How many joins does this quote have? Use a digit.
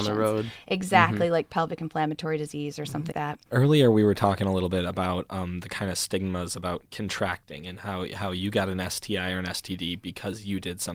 2